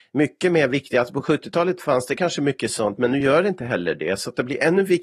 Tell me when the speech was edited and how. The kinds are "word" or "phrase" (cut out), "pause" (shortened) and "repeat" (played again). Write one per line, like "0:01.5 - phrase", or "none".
none